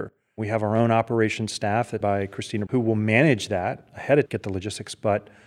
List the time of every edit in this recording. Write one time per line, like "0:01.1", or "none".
0:02.0
0:02.7
0:04.3